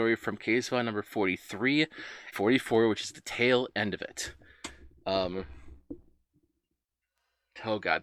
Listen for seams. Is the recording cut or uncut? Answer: cut